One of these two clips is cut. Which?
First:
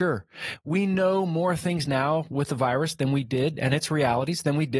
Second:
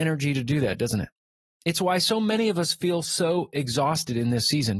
second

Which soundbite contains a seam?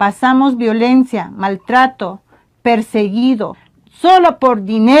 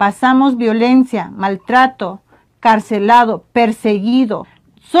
first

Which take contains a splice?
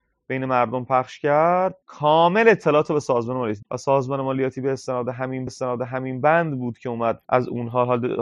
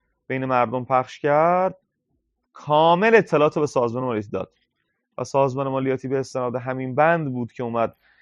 first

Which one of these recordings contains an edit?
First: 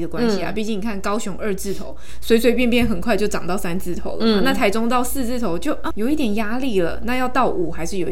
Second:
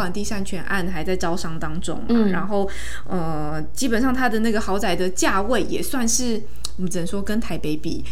first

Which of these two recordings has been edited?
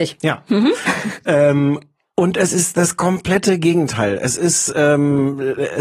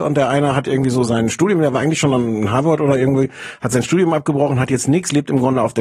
second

